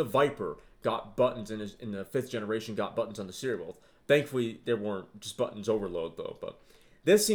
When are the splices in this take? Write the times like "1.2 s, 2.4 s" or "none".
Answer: none